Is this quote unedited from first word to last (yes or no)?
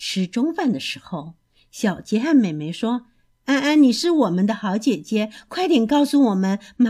yes